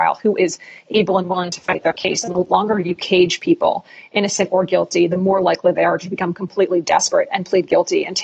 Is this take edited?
no; 0 cuts

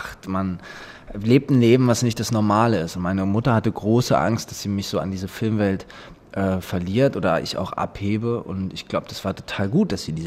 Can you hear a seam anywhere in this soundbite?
no; 0 cuts

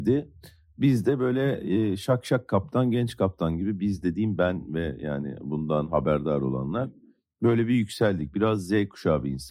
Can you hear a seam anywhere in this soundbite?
no; 0 cuts

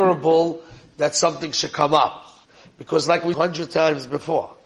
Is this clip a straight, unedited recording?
no; 2 cuts; at 2.4 s, 3.3 s

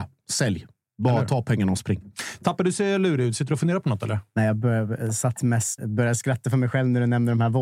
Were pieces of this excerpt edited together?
yes; 1 cut; at 5.8 s

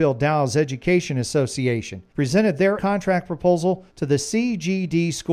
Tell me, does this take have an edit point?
yes; 3 cuts; at 2.1 s, 2.8 s, 3.9 s

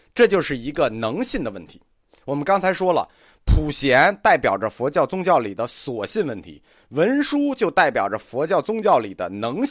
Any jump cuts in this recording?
no; 0 cuts

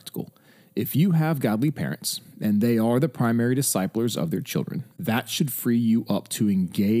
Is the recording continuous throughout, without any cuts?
no; 1 cut; at 4.9 s

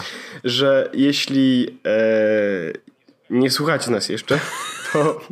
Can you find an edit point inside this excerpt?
no; 0 cuts

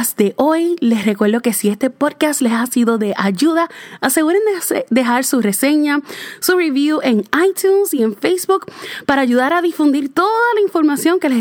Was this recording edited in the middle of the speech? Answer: no; 0 cuts

